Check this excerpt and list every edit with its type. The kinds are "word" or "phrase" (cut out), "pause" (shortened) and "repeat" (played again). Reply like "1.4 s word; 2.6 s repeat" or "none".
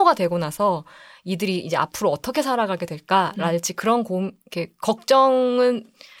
none